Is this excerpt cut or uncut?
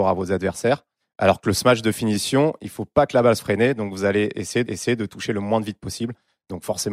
cut